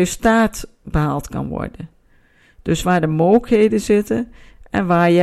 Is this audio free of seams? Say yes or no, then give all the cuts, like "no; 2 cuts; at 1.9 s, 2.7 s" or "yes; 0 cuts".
yes; 0 cuts